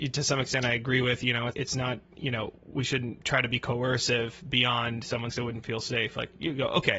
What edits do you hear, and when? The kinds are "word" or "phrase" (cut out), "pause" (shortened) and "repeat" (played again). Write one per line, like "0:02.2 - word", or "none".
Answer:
0:01.5 - word
0:02.6 - pause
0:05.3 - phrase